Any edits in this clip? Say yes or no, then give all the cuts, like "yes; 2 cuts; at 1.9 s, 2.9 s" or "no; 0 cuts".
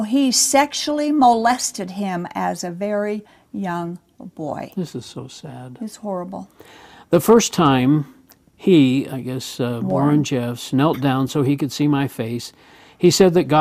no; 0 cuts